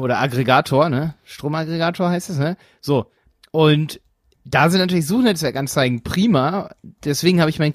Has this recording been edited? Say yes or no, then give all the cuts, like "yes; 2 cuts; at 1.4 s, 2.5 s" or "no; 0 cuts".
no; 0 cuts